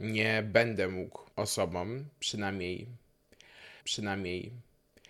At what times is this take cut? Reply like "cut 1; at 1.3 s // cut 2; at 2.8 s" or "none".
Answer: cut 1; at 1.3 s // cut 2; at 3.8 s